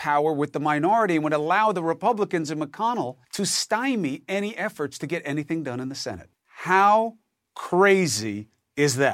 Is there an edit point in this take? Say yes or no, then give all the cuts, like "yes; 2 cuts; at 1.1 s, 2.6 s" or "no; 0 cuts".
yes; 2 cuts; at 3.2 s, 6.3 s